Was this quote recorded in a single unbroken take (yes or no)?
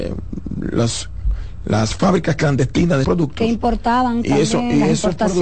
no